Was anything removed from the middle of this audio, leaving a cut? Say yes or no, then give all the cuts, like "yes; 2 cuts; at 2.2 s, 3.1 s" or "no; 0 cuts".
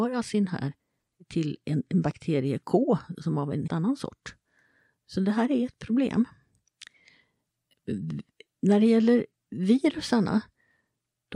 yes; 1 cut; at 3.7 s